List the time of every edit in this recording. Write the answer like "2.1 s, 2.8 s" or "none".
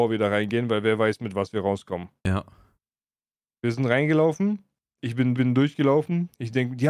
2.2 s, 5.3 s